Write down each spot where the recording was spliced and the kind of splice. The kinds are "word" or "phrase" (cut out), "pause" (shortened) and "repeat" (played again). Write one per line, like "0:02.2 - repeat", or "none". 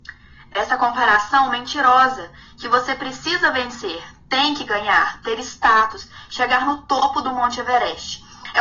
none